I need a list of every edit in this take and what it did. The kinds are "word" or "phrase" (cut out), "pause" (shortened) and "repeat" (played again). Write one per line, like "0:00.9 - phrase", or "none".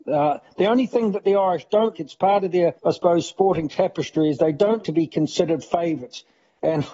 0:01.9 - word
0:02.8 - pause
0:04.8 - word